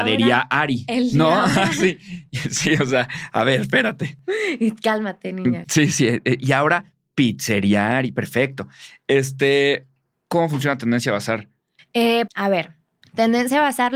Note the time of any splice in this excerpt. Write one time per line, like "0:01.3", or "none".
0:10.1
0:12.3
0:13.0